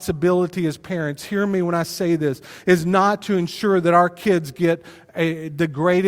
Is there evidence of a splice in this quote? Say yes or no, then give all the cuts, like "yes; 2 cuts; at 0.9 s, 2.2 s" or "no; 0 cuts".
no; 0 cuts